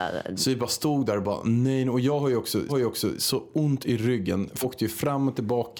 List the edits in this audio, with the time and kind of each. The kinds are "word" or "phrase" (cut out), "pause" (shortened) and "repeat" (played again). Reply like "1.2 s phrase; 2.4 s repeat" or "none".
2.7 s repeat; 4.6 s phrase